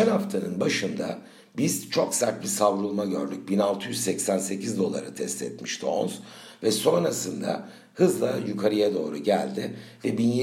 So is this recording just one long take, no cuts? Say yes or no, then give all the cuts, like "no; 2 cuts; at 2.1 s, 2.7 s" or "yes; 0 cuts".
yes; 0 cuts